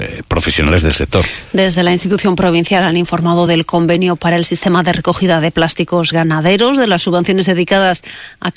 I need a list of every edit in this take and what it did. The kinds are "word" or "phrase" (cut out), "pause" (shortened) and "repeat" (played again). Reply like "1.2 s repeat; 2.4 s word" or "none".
none